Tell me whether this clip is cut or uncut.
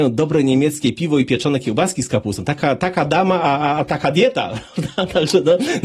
uncut